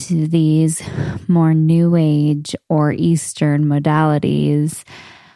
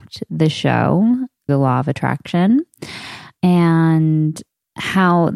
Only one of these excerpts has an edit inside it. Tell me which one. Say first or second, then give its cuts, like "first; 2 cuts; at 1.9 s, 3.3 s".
second; 1 cut; at 1.5 s